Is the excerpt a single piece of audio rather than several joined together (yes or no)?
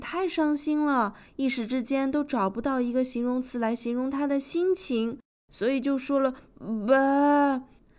yes